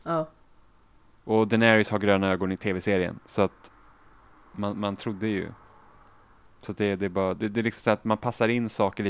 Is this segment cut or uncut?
uncut